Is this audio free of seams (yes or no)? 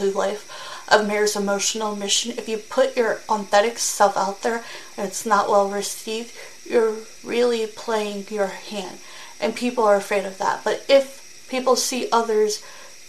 yes